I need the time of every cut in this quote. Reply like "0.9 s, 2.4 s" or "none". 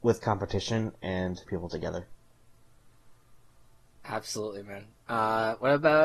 1.5 s